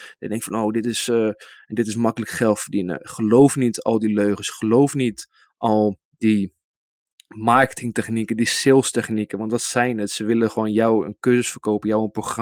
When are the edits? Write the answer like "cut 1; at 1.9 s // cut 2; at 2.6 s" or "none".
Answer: cut 1; at 6.1 s

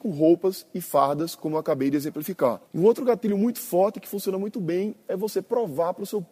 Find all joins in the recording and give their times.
cut 1; at 2.7 s

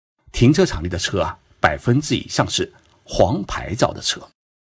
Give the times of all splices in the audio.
none

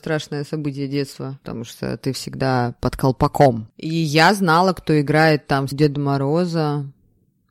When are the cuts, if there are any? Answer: cut 1; at 5.7 s

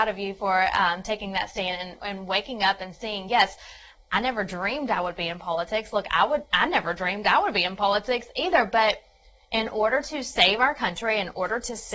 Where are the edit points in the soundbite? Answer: none

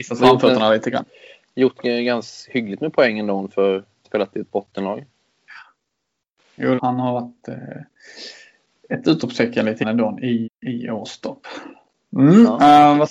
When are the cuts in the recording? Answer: cut 1; at 4.0 s // cut 2; at 6.8 s // cut 3; at 9.8 s // cut 4; at 10.4 s

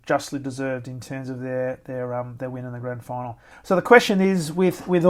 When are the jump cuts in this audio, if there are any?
cut 1; at 3.5 s

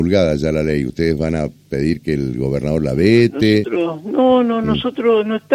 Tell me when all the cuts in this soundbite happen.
none

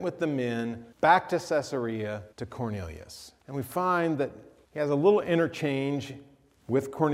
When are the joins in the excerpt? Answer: cut 1; at 0.9 s // cut 2; at 2.3 s // cut 3; at 3.4 s // cut 4; at 4.6 s

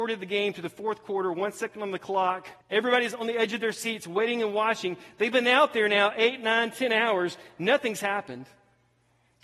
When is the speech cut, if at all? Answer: cut 1; at 2.6 s

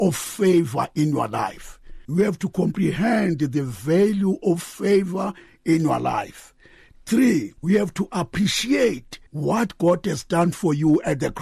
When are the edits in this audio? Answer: cut 1; at 2.0 s // cut 2; at 7.6 s // cut 3; at 9.3 s

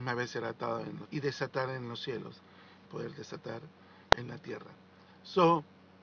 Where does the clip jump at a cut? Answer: cut 1; at 1.1 s // cut 2; at 2.9 s // cut 3; at 4.1 s

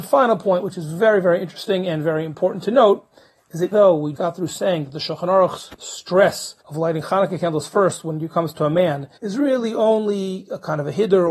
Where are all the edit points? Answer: cut 1; at 3.7 s // cut 2; at 4.1 s // cut 3; at 6.6 s // cut 4; at 9.2 s

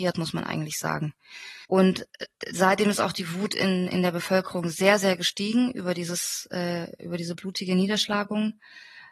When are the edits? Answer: cut 1; at 1.6 s

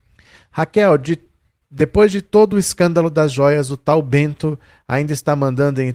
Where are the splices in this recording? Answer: none

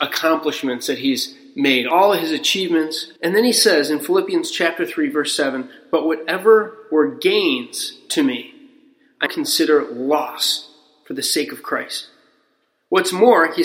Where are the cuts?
cut 1; at 3.2 s // cut 2; at 9.3 s

